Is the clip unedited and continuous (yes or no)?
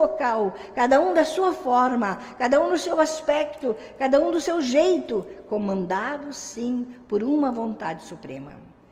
yes